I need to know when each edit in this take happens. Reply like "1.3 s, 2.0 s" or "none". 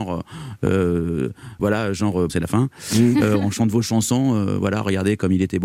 1.6 s, 2.3 s